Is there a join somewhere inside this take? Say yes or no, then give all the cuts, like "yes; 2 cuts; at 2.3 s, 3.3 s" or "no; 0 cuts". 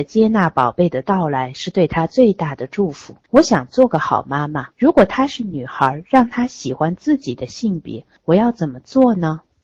yes; 2 cuts; at 3.2 s, 4.7 s